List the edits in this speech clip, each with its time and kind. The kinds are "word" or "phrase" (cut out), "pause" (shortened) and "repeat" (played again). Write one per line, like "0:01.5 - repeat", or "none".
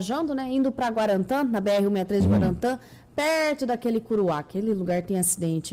none